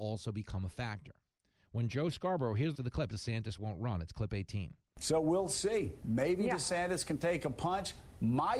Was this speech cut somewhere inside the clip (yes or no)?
yes